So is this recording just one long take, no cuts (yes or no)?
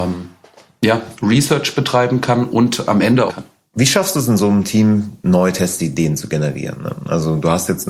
no